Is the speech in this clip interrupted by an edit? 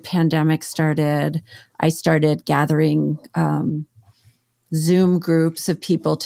no; 0 cuts

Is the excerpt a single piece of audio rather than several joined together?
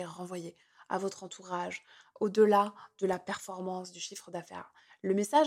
yes; 0 cuts

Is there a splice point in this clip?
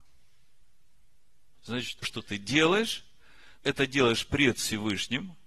yes; 2 cuts; at 2.0 s, 3.6 s

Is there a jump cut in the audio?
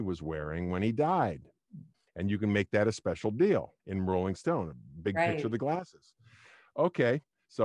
yes; 2 cuts; at 1.9 s, 3.8 s

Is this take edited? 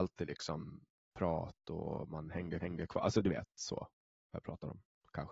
yes; 1 cut; at 2.6 s

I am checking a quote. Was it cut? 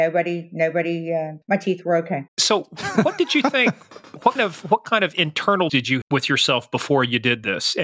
yes; 5 cuts; at 1.4 s, 2.3 s, 4.4 s, 5.7 s, 6.0 s

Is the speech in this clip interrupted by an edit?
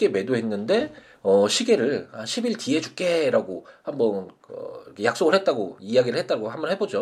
no; 0 cuts

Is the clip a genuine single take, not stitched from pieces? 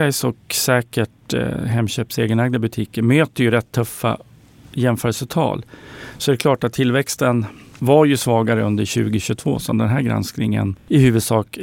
yes; 0 cuts

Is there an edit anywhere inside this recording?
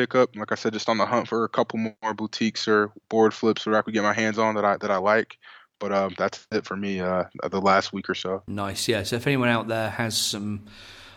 yes; 1 cut; at 3.0 s

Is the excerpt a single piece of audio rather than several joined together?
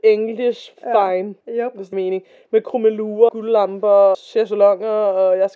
no; 4 cuts; at 1.4 s, 1.9 s, 3.3 s, 4.1 s

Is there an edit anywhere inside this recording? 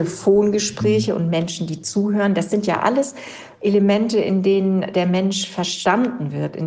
no; 0 cuts

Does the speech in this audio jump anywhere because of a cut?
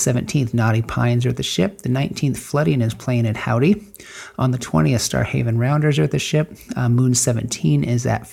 no; 0 cuts

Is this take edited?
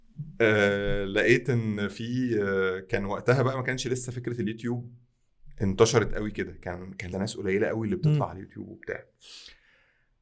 yes; 1 cut; at 7.1 s

